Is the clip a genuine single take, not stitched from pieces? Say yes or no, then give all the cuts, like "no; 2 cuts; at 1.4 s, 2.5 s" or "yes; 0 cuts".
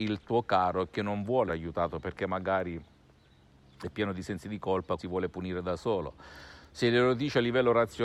no; 2 cuts; at 1.5 s, 5.0 s